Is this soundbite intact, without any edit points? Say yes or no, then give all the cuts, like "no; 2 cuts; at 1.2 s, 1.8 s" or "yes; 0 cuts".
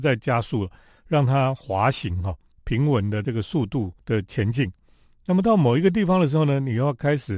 yes; 0 cuts